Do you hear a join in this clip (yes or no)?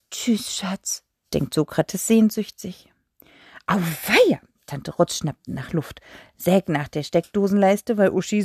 no